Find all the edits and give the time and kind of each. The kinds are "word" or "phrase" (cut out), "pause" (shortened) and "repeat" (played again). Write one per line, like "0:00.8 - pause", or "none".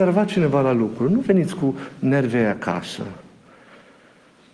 none